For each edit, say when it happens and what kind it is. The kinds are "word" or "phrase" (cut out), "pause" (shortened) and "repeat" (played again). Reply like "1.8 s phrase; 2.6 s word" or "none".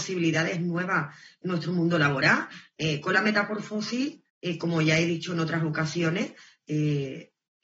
4.3 s pause